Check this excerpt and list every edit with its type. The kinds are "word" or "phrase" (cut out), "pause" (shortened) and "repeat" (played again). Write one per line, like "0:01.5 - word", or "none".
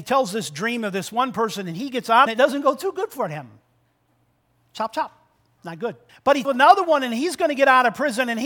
0:02.3 - phrase
0:06.1 - pause
0:06.4 - word